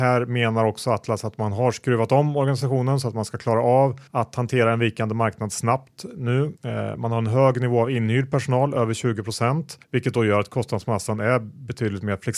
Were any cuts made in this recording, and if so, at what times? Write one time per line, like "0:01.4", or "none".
0:04.1
0:06.6
0:09.8